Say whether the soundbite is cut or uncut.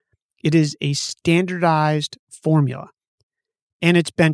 uncut